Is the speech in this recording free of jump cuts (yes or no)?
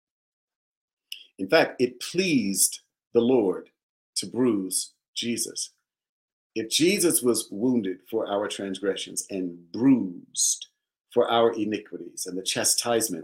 yes